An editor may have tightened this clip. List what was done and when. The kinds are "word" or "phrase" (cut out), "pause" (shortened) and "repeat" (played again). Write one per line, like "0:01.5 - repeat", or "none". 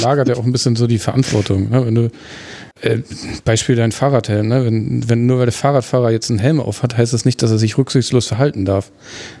0:02.7 - pause